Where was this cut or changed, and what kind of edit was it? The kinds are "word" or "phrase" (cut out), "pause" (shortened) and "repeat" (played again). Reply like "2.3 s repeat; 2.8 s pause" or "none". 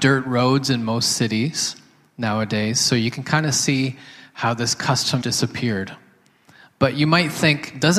5.2 s word